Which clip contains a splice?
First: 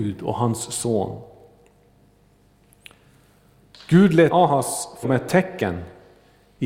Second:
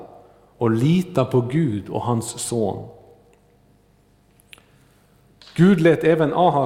first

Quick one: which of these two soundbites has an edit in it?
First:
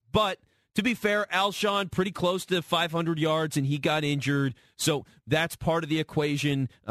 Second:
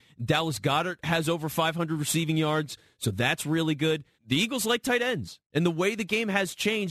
second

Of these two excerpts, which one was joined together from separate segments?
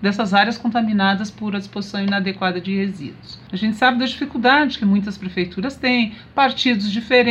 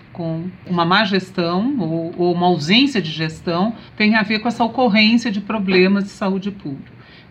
second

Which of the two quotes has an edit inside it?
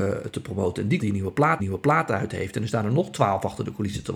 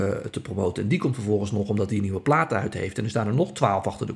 first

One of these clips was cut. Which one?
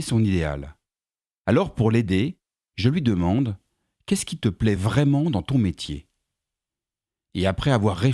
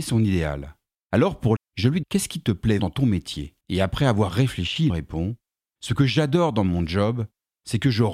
second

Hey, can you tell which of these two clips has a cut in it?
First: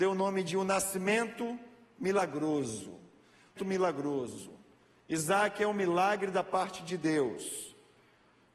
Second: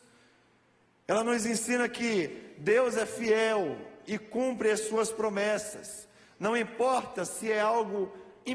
first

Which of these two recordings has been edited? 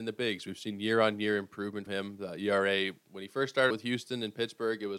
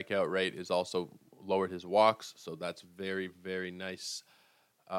first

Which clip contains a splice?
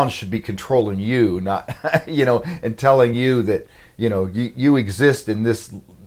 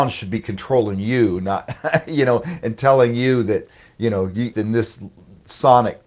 second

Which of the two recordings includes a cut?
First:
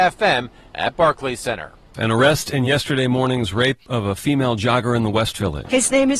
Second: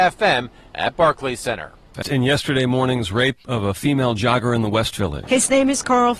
second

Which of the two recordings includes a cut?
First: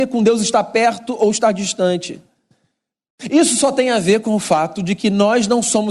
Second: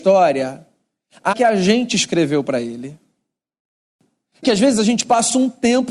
second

